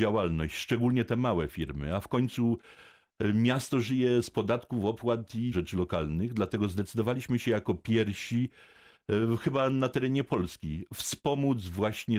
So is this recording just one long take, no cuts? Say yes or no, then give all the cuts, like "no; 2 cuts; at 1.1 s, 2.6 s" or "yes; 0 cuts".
no; 1 cut; at 5.5 s